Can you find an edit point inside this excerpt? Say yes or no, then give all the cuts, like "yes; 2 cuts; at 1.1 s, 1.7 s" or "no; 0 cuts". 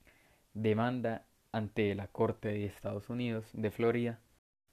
no; 0 cuts